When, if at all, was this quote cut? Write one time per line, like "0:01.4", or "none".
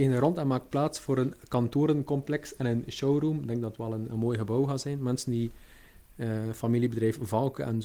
none